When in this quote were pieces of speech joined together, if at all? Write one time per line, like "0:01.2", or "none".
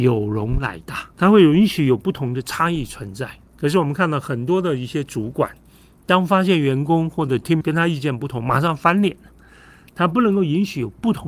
0:01.1
0:03.4
0:07.6